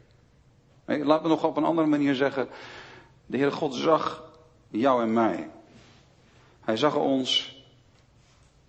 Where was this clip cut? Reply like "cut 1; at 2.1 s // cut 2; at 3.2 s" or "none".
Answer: none